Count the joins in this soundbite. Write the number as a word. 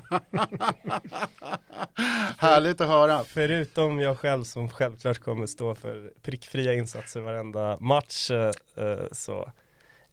zero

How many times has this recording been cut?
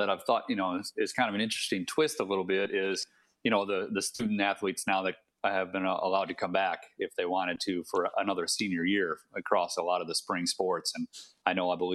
zero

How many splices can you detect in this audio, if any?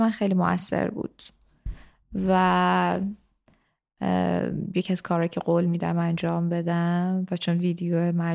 zero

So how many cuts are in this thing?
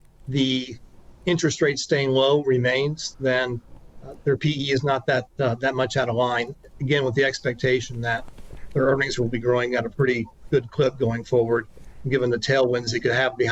zero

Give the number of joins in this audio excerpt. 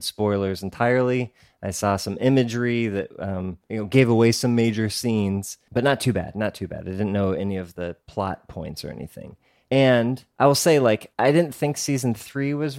zero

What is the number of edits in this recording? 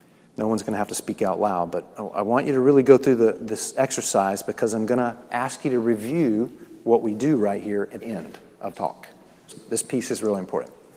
three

